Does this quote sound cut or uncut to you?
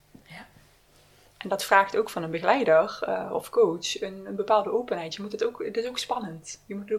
uncut